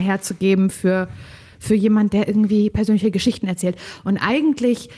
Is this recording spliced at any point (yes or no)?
no